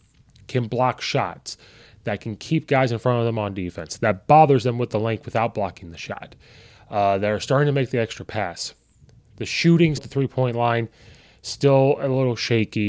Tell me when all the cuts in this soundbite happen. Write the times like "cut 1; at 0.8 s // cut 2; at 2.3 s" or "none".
cut 1; at 10.0 s